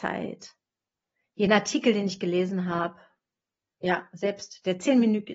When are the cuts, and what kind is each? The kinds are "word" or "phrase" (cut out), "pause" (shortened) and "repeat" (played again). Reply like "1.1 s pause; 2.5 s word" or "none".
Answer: none

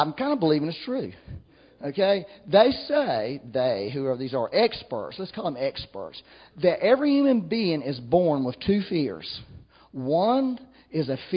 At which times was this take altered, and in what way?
none

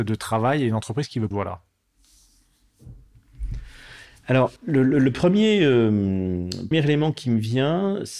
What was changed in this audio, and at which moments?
1.3 s phrase; 4.6 s pause; 6.7 s word

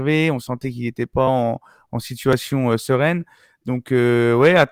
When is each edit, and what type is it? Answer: none

